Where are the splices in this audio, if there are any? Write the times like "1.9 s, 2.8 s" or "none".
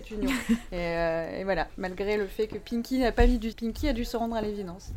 3.5 s